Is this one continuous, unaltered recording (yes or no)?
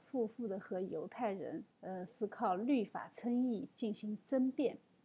no